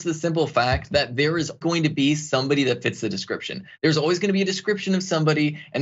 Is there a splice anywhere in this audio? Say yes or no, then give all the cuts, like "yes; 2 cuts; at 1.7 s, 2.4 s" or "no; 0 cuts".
yes; 1 cut; at 1.6 s